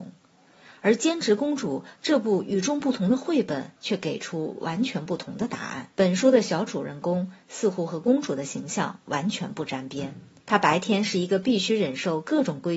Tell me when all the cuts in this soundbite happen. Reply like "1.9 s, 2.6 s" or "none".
3.8 s, 5.9 s, 10.4 s